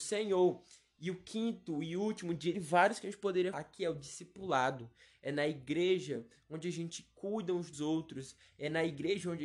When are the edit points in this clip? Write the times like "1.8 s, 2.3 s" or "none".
2.5 s, 3.5 s, 7.7 s

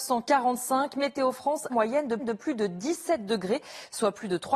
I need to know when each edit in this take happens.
1.7 s, 2.2 s

